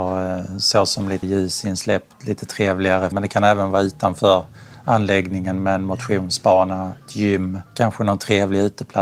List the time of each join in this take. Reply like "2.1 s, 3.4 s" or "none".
1.2 s, 3.1 s, 7.7 s